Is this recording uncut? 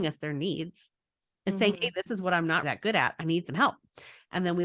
no; 1 cut; at 2.6 s

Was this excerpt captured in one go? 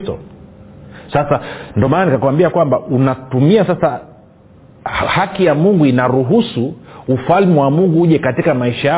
yes; 0 cuts

